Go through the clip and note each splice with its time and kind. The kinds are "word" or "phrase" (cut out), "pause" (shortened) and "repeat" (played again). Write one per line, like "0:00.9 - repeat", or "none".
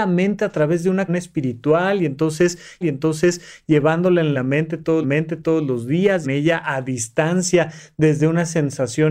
0:01.1 - word
0:02.8 - repeat
0:04.3 - phrase
0:05.0 - repeat
0:06.2 - phrase